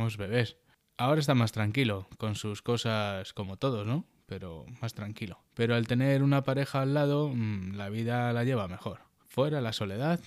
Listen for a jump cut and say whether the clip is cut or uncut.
cut